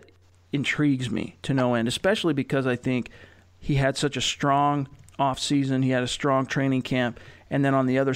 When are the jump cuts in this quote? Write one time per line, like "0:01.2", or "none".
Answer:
none